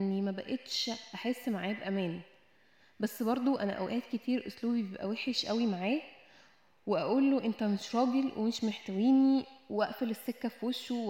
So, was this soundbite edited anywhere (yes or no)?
no